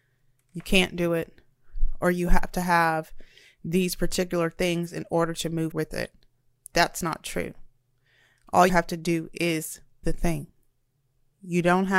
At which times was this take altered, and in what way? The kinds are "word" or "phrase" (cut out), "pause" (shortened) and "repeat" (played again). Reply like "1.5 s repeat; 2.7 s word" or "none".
5.7 s word; 8.7 s word; 10.0 s word